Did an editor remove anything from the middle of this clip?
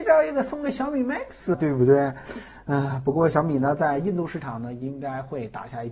yes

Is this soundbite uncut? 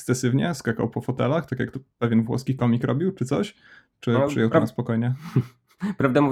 yes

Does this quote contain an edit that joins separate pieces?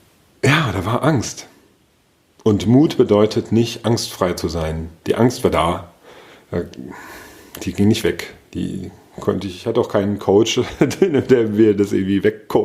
no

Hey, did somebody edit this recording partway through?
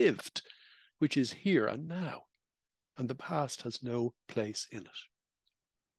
no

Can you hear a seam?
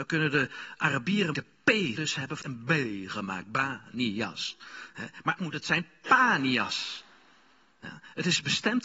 yes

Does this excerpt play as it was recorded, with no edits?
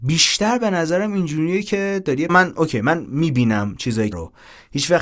no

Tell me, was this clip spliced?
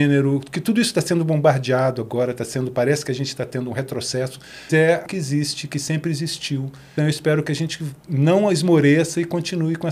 yes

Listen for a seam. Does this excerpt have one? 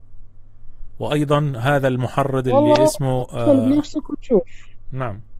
no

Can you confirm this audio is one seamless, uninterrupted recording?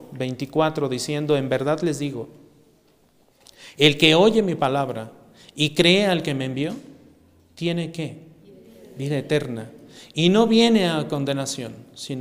yes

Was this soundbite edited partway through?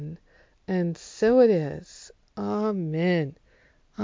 no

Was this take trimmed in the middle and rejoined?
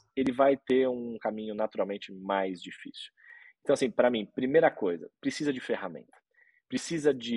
no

